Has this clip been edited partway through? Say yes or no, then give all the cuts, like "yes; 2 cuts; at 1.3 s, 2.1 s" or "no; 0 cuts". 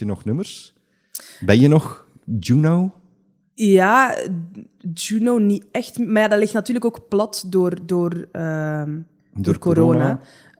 no; 0 cuts